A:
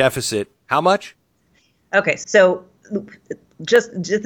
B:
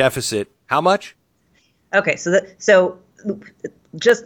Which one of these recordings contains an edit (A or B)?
A